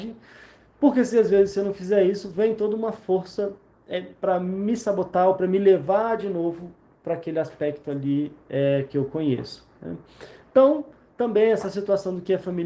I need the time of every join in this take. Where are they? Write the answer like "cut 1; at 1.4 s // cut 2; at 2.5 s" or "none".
none